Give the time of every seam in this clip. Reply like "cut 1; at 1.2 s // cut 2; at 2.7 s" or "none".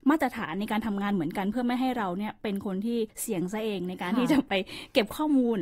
cut 1; at 3.1 s